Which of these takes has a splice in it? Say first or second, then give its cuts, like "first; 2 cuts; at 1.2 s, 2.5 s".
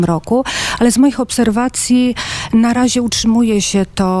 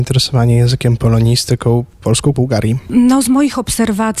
second; 2 cuts; at 1.0 s, 2.3 s